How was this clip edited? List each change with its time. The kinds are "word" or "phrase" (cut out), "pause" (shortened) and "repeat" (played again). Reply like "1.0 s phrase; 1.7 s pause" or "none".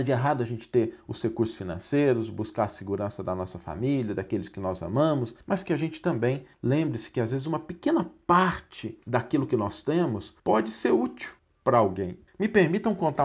5.4 s pause; 6.5 s pause; 9.0 s pause; 10.4 s pause; 11.4 s pause; 12.3 s pause